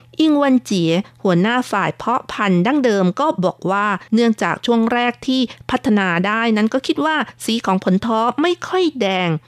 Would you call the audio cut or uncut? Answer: cut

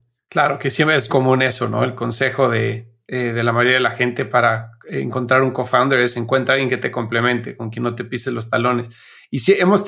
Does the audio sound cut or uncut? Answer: cut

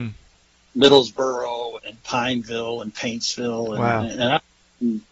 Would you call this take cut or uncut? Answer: cut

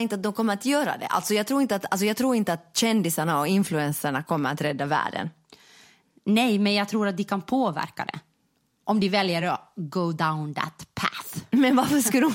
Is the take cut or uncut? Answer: uncut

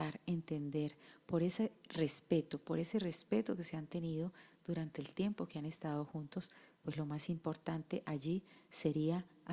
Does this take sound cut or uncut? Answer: uncut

